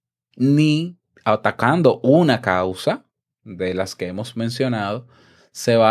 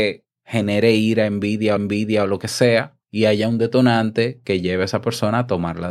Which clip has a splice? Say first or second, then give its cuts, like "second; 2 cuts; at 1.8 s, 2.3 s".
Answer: second; 2 cuts; at 1.8 s, 3.0 s